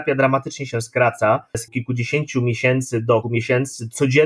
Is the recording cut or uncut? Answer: cut